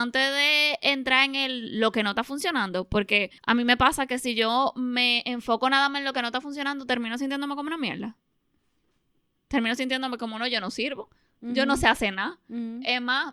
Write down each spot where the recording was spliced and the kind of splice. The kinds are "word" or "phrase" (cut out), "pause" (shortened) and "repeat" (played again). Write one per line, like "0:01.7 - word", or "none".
0:03.4 - pause